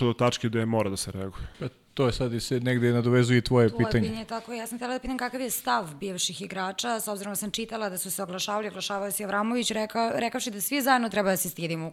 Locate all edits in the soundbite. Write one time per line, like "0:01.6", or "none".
0:01.5